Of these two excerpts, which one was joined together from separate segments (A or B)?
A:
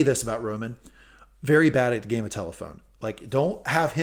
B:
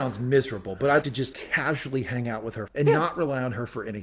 B